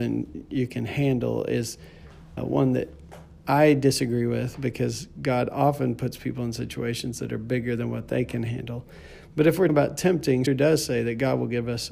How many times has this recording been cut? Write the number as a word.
three